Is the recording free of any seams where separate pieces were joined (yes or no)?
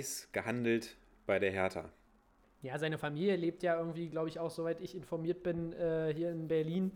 yes